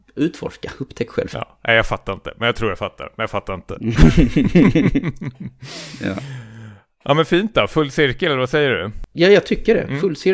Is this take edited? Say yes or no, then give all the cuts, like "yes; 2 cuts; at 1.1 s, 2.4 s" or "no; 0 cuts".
no; 0 cuts